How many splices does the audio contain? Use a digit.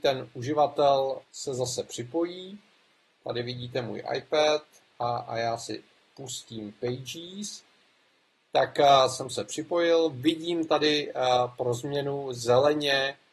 1